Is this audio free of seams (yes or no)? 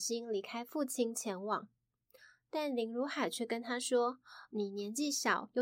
yes